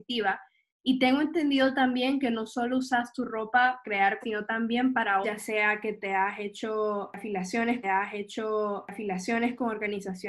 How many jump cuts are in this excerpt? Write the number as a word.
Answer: four